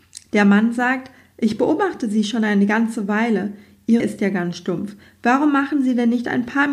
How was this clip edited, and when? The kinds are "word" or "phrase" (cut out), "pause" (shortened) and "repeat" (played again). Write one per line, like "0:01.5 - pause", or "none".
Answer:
0:04.0 - word